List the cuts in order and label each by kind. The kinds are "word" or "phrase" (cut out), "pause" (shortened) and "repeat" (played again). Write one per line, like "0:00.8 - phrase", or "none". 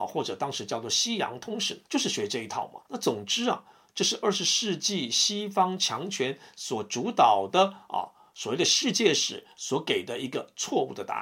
0:01.8 - pause
0:02.9 - pause